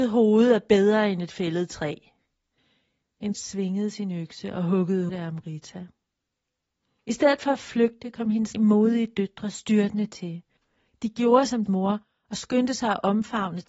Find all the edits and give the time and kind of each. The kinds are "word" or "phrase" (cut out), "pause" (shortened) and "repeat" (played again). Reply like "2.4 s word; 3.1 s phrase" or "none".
3.3 s word; 5.1 s word; 8.5 s word; 11.7 s word